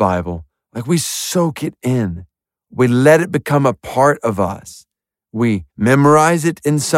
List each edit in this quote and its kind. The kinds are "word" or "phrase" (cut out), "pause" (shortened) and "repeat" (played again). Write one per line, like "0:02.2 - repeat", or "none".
0:02.5 - pause
0:05.7 - pause

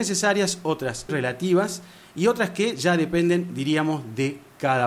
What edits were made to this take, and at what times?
0:01.1 - word

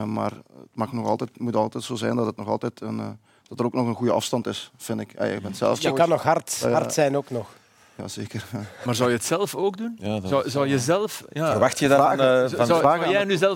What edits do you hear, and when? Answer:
none

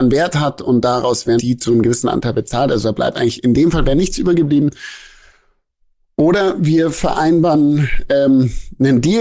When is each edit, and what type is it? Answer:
0:01.4 - word

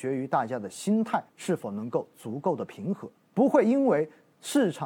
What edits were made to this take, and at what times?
0:01.3 - pause
0:03.2 - pause

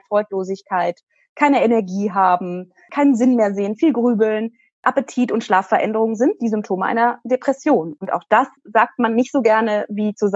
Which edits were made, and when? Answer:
0:08.6 - pause

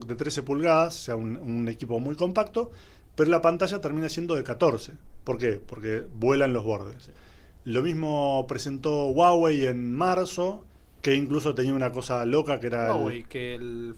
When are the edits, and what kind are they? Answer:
none

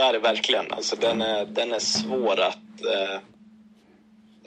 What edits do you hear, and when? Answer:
none

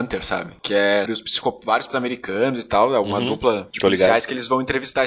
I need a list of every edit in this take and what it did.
0:01.1 - word
0:01.9 - word

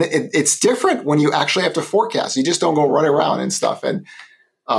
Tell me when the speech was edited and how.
none

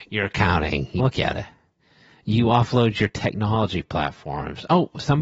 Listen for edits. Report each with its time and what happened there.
0:01.0 - phrase

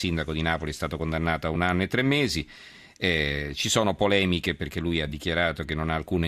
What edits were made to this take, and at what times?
none

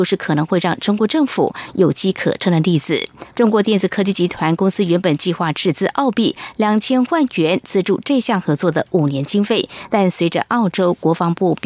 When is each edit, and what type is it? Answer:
0:03.3 - pause

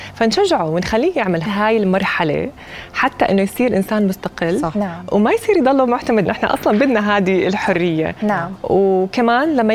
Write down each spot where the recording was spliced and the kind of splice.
0:01.4 - phrase
0:06.2 - word

